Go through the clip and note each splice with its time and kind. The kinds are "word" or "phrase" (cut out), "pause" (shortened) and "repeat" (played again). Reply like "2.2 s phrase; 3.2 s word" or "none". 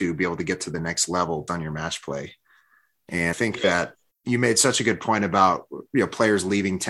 1.5 s word; 3.3 s word